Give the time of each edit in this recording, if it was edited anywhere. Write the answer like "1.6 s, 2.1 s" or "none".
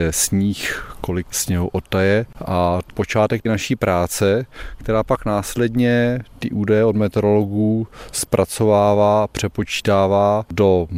2.9 s